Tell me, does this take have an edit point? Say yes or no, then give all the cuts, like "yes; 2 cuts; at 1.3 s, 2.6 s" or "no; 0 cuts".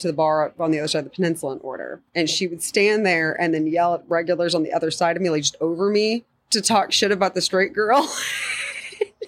yes; 2 cuts; at 2.1 s, 6.3 s